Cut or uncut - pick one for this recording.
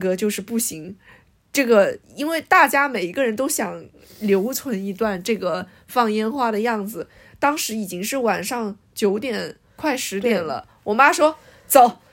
uncut